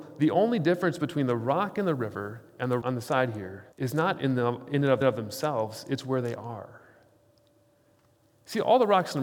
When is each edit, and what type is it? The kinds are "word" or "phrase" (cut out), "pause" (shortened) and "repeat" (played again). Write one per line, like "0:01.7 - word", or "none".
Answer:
0:02.8 - word
0:03.7 - pause
0:05.0 - repeat